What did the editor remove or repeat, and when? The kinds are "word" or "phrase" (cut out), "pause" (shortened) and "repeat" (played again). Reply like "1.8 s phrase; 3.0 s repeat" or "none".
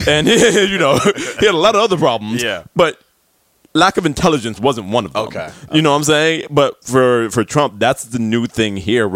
none